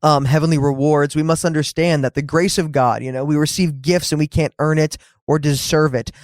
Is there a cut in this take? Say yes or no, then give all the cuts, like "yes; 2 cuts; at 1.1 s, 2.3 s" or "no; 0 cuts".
no; 0 cuts